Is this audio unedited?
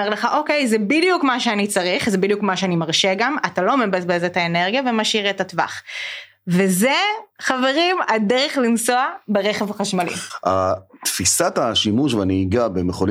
no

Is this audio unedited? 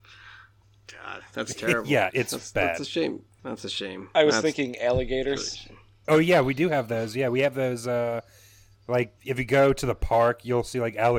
no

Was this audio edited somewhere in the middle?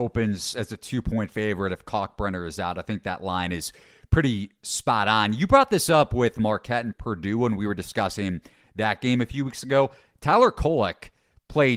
no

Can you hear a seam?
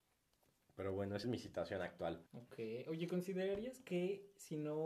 yes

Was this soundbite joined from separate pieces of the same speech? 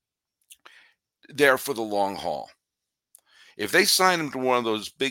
no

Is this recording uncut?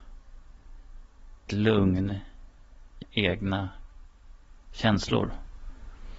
no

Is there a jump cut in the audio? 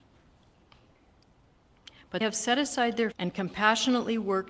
yes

